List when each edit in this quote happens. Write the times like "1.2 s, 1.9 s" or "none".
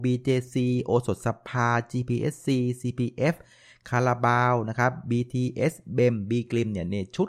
none